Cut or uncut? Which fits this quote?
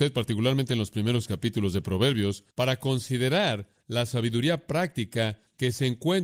cut